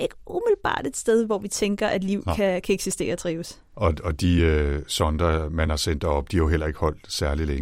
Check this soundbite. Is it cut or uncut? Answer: uncut